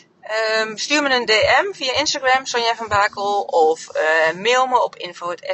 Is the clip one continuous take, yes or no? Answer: yes